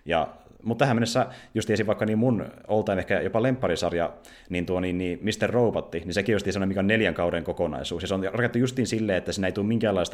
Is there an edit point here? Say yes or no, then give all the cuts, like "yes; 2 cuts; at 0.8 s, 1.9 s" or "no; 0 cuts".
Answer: no; 0 cuts